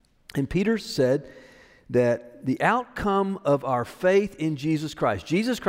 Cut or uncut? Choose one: uncut